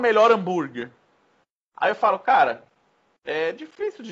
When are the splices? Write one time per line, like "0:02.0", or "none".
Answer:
none